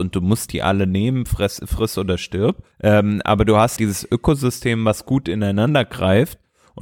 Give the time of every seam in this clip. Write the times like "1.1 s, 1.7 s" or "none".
2.7 s, 3.8 s